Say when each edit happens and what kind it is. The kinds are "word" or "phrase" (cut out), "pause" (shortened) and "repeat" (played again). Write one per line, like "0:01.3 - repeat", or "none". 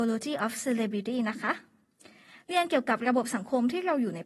none